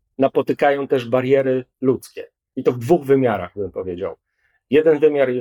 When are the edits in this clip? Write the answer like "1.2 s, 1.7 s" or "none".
none